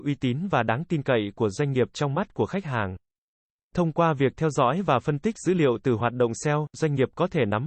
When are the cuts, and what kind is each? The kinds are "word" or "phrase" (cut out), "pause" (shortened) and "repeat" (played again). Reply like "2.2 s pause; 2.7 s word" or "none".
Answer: none